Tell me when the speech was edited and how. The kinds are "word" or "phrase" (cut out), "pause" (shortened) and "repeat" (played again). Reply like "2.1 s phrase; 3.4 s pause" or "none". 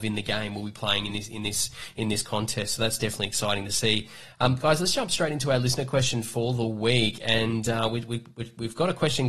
none